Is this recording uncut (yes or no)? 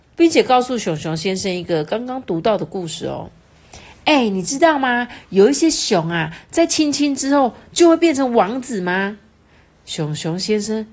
yes